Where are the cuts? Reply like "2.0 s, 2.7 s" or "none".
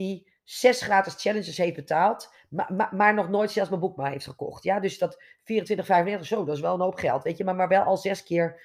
none